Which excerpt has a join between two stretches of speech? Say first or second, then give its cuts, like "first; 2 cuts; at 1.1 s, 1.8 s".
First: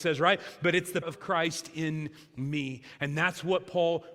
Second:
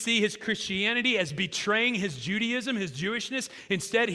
first; 1 cut; at 1.0 s